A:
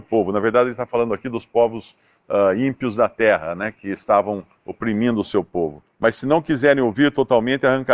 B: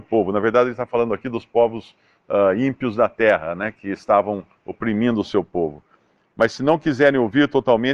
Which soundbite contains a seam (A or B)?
A